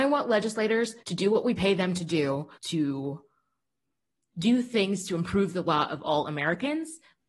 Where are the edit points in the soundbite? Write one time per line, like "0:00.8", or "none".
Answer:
0:01.0
0:02.6